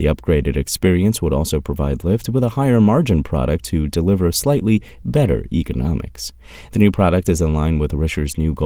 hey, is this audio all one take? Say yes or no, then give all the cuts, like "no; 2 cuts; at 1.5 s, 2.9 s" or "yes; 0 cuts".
yes; 0 cuts